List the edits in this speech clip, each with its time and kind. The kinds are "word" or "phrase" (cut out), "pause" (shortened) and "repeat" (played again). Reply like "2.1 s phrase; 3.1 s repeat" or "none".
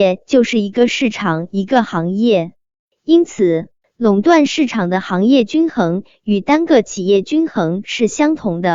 3.8 s pause